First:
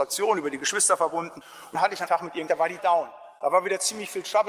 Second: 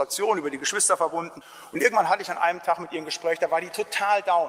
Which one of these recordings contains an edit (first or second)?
first